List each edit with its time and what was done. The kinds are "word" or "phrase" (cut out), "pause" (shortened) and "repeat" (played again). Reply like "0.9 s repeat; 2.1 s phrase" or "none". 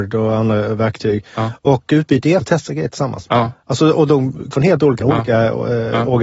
2.4 s word; 4.5 s word; 5.0 s word